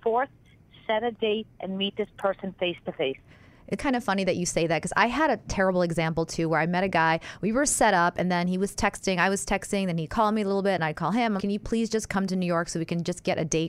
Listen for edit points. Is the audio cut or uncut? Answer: cut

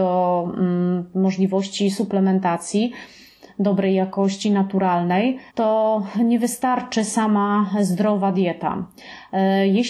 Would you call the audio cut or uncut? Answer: cut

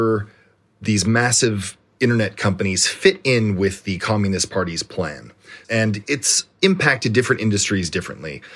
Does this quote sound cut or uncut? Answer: uncut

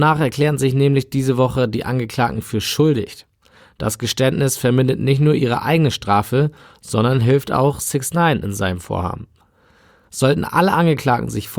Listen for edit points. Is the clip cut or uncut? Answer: uncut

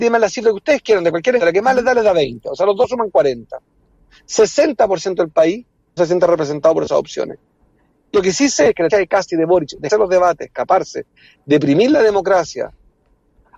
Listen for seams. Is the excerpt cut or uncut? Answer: cut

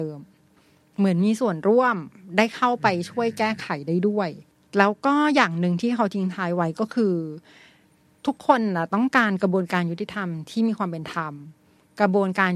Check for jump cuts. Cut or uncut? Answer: uncut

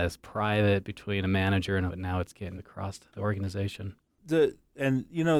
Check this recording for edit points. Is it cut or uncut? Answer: cut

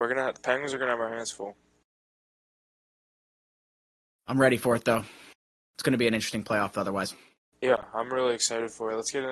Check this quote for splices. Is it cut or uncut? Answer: uncut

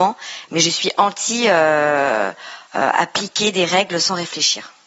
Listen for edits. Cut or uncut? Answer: cut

